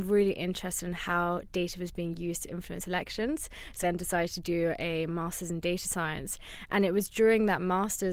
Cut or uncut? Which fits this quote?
cut